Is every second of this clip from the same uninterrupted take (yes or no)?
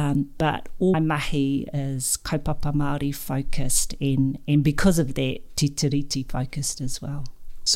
no